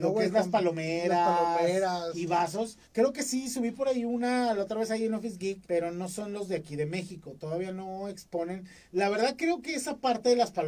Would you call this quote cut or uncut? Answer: cut